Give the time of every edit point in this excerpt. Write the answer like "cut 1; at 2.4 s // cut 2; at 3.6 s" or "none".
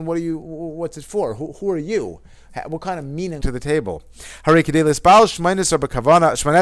cut 1; at 3.4 s